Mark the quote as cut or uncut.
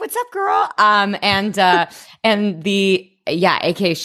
uncut